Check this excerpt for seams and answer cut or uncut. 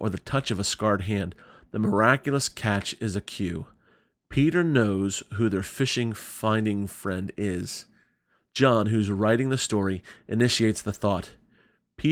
uncut